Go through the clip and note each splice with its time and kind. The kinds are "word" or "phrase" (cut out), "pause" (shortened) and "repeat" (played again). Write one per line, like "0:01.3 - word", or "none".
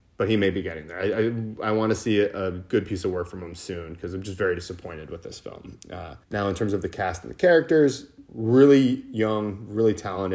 0:06.2 - pause